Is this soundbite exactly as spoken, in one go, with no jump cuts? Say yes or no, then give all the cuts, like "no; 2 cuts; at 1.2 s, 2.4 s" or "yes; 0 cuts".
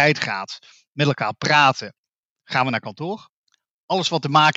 yes; 0 cuts